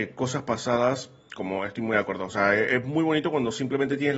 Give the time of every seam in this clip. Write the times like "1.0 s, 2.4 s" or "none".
none